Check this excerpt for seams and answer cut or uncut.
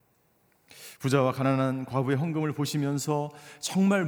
uncut